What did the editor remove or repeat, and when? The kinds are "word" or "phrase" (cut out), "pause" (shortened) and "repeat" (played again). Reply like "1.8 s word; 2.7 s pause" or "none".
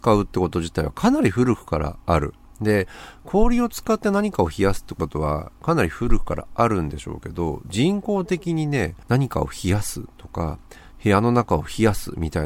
9.0 s pause